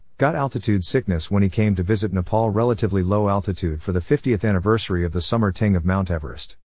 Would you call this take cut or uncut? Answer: uncut